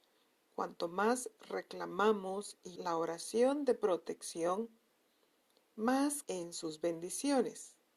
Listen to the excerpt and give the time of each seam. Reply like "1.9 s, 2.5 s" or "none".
2.8 s, 6.2 s